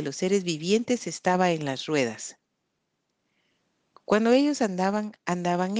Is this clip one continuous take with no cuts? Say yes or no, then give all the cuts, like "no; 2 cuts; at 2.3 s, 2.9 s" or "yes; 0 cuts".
yes; 0 cuts